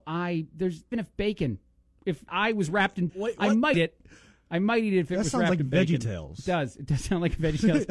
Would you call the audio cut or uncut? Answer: cut